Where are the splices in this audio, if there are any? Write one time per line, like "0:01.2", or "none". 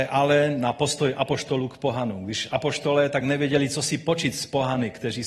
none